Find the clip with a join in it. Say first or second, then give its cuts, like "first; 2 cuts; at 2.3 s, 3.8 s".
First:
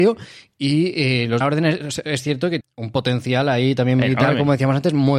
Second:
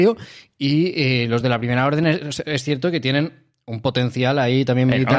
first; 2 cuts; at 1.4 s, 2.6 s